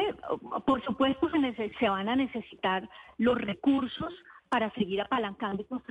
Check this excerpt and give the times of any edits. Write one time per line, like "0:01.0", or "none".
none